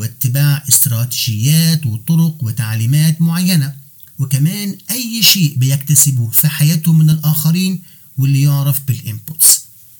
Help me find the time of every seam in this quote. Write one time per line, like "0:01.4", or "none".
none